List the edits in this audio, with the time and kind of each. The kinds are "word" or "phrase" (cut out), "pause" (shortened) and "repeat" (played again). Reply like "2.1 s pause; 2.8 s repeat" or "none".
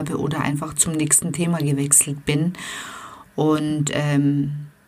none